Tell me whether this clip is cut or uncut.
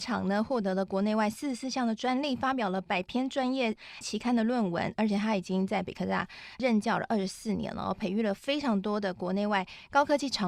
cut